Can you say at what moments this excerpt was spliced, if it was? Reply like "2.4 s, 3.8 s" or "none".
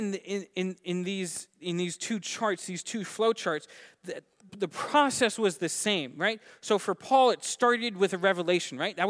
4.5 s

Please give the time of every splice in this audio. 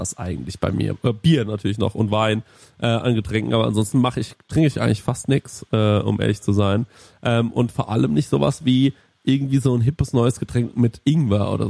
none

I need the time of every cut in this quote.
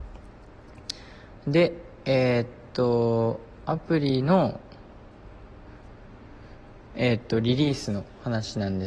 none

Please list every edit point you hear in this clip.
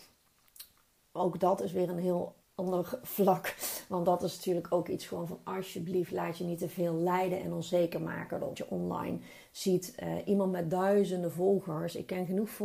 2.4 s, 8.5 s

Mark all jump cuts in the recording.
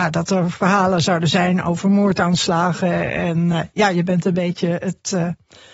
none

